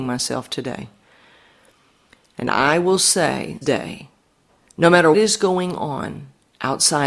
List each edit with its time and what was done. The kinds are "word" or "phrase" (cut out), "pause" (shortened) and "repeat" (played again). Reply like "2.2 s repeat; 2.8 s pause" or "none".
3.6 s word; 5.1 s word